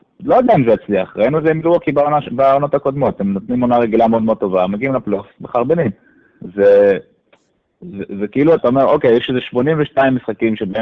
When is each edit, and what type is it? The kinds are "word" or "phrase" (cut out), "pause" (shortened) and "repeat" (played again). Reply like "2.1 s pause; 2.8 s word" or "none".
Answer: 8.6 s word